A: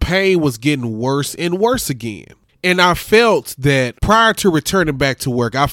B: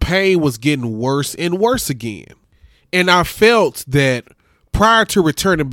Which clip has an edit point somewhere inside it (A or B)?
A